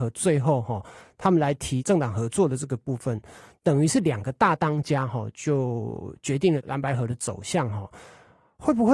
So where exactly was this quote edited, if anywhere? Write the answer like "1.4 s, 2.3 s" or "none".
none